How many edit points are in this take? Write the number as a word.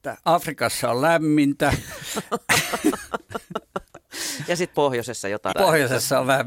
two